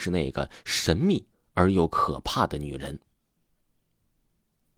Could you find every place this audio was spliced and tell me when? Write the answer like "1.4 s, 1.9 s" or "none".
none